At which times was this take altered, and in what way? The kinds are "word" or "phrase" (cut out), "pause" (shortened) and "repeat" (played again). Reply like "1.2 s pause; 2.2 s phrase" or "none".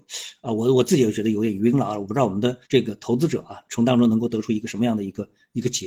2.7 s pause